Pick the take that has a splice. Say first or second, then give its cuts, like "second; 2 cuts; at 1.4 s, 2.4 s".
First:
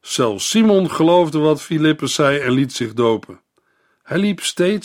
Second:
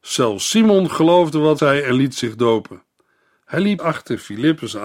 second; 2 cuts; at 1.6 s, 3.8 s